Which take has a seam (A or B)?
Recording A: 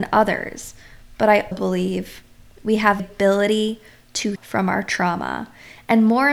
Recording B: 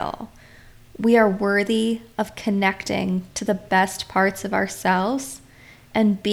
A